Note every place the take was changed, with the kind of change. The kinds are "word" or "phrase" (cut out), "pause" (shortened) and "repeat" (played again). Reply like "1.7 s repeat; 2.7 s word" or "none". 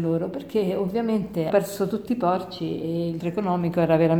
1.5 s word; 2.1 s word; 3.2 s word